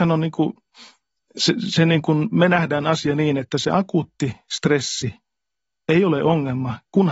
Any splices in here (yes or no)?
no